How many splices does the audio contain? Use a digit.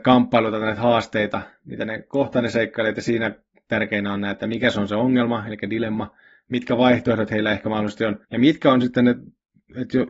1